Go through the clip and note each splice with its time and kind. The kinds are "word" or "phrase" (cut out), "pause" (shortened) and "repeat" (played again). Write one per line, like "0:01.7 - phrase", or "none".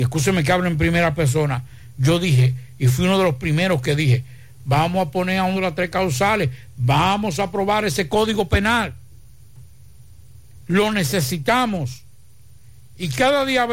0:05.5 - word